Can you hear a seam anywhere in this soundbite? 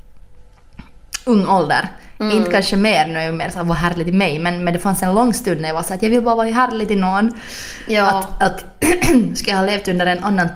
no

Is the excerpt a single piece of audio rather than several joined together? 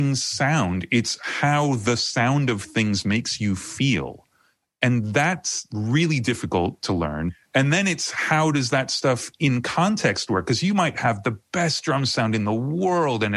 yes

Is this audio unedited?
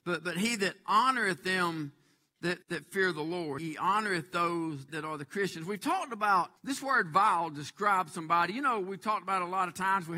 no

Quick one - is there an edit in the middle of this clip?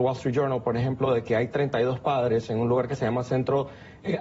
no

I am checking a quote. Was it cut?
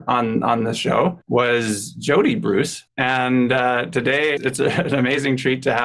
yes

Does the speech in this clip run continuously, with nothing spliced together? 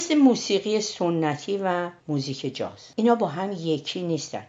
yes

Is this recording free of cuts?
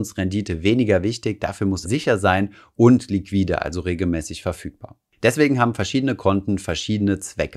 no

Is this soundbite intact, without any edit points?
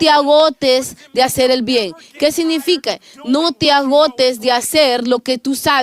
yes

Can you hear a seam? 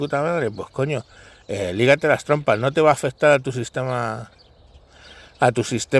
no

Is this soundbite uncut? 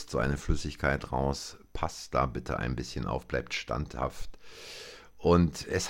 yes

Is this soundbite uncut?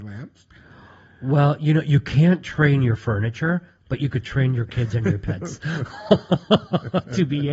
yes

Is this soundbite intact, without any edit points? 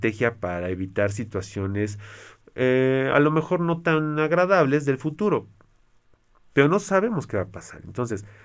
yes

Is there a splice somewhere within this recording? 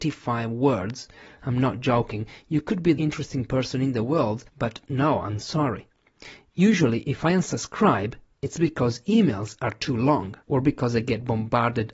yes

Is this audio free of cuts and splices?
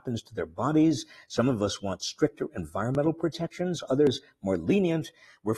yes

